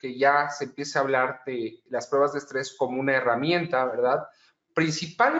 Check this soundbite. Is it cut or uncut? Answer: uncut